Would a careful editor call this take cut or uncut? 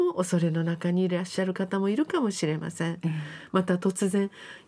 uncut